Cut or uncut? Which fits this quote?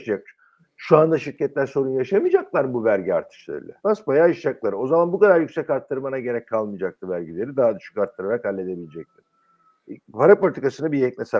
cut